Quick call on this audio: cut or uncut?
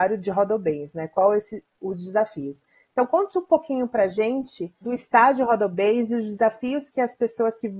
uncut